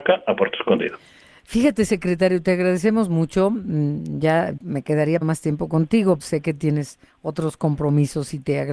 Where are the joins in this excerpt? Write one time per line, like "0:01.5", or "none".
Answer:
0:04.6
0:05.2
0:06.2